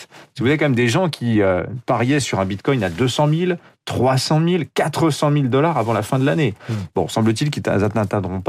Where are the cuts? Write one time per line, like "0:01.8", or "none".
none